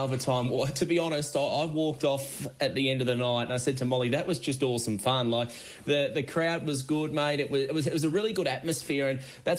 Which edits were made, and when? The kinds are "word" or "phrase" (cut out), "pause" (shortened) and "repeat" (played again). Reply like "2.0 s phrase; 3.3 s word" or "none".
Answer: none